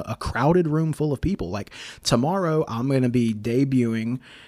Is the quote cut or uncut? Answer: uncut